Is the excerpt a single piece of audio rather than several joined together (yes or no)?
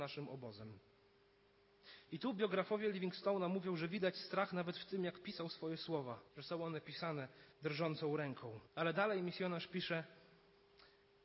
no